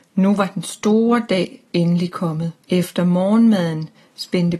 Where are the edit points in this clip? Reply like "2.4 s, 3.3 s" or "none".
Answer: 2.6 s